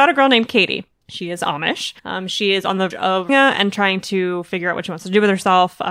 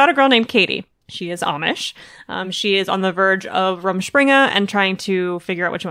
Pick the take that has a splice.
first; 3 cuts; at 2.0 s, 2.9 s, 3.3 s

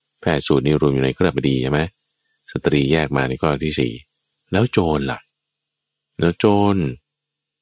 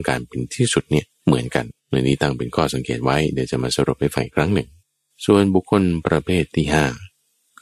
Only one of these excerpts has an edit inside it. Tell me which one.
second; 3 cuts; at 1.1 s, 1.8 s, 4.8 s

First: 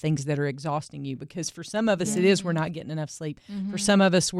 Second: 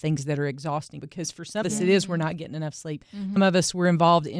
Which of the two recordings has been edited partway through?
second; 3 cuts; at 1.0 s, 1.6 s, 3.4 s

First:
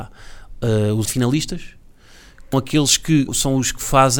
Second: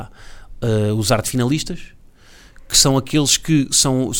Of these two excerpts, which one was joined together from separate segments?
first; 3 cuts; at 1.0 s, 2.5 s, 3.3 s

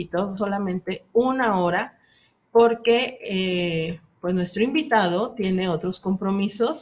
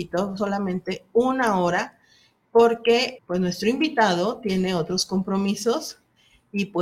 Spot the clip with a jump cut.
second; 1 cut; at 3.2 s

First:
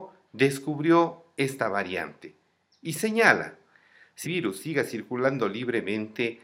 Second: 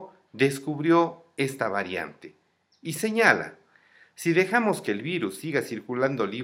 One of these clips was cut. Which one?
first; 1 cut; at 4.2 s

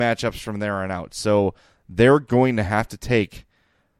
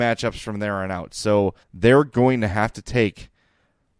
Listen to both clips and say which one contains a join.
second; 1 cut; at 1.6 s

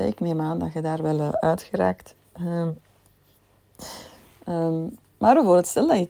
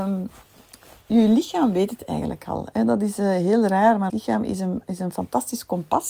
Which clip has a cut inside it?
second; 1 cut; at 4.1 s

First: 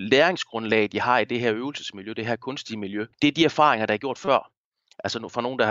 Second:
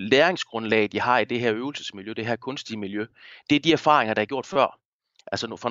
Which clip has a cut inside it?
first; 1 cut; at 3.1 s

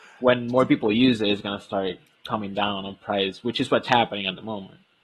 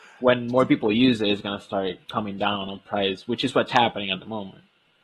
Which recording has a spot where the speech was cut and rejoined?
second; 1 cut; at 2.0 s

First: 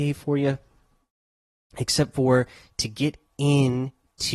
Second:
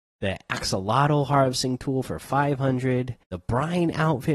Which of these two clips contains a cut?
second; 1 cut; at 3.2 s

